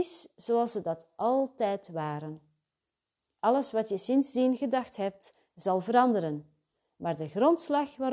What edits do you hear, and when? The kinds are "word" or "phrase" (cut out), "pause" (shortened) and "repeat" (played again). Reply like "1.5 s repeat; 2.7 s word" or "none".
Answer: none